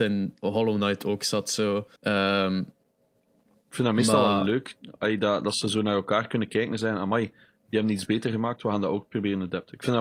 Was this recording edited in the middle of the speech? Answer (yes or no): yes